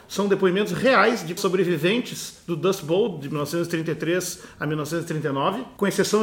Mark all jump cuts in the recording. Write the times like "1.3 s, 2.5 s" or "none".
1.4 s